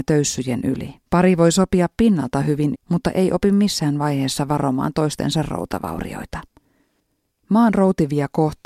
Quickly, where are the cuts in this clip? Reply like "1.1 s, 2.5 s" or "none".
1.1 s, 2.7 s